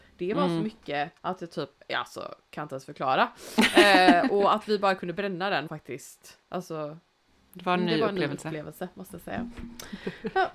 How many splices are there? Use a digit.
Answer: 3